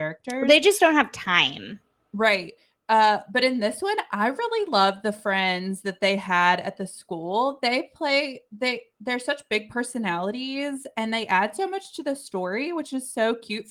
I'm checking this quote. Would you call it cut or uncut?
uncut